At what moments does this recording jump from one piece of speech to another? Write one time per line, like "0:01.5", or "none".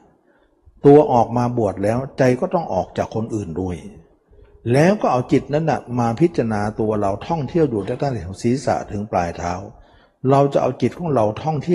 none

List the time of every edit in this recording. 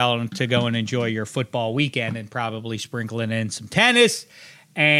none

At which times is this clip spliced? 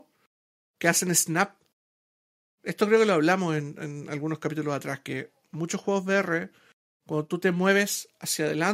none

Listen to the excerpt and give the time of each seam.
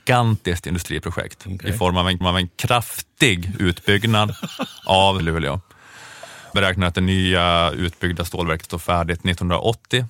0:02.2
0:05.2
0:06.5
0:08.6

